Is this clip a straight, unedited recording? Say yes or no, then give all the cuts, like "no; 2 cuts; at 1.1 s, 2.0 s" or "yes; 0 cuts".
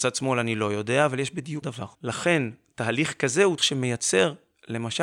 no; 3 cuts; at 1.6 s, 1.9 s, 3.6 s